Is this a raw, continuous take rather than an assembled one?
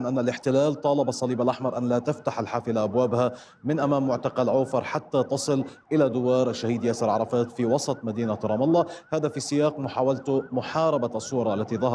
yes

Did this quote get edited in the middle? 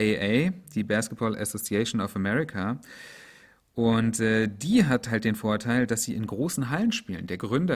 no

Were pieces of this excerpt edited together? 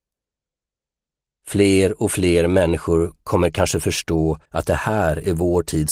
yes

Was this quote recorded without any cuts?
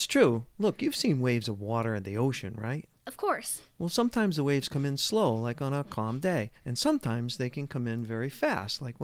yes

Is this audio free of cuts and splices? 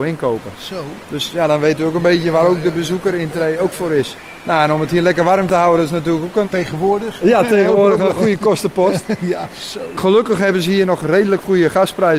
no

